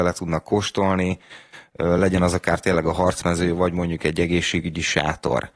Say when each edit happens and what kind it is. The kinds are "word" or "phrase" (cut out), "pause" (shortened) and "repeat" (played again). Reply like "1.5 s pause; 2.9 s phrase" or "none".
none